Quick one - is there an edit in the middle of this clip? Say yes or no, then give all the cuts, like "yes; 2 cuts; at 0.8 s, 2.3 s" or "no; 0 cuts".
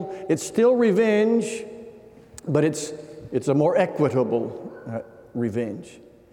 no; 0 cuts